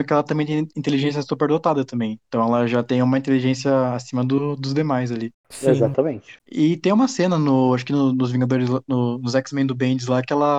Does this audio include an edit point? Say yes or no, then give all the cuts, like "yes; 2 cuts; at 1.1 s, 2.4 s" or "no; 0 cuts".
yes; 2 cuts; at 5.4 s, 6.4 s